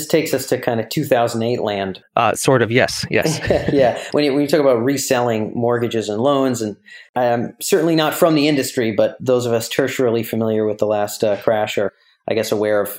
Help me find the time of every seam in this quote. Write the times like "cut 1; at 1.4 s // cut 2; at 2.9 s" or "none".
cut 1; at 2.0 s